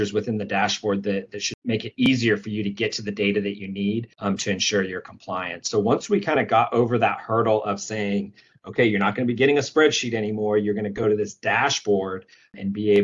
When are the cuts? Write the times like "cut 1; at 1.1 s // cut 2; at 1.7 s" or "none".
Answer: cut 1; at 4.1 s